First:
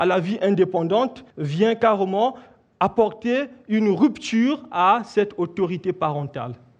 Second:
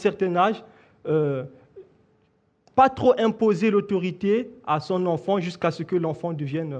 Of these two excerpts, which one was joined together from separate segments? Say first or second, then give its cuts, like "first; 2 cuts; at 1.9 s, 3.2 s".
first; 1 cut; at 1.3 s